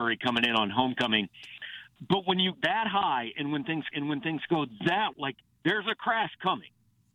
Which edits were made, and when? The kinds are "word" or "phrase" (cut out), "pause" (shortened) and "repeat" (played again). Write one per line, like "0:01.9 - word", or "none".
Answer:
0:02.5 - word
0:03.9 - repeat
0:05.1 - word